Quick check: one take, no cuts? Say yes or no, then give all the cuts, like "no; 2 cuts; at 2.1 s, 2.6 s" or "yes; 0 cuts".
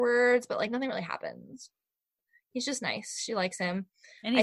yes; 0 cuts